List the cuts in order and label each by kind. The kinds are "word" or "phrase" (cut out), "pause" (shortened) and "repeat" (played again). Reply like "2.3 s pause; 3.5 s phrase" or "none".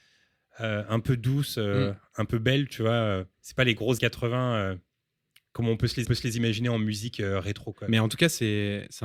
3.3 s pause; 4.0 s word; 6.0 s repeat